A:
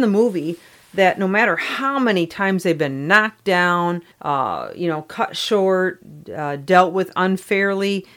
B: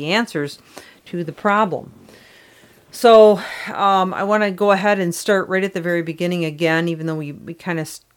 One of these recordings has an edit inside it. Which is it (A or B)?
A